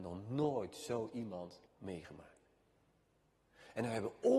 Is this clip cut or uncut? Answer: cut